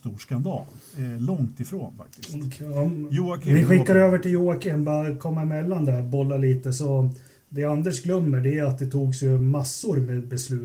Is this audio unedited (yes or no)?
yes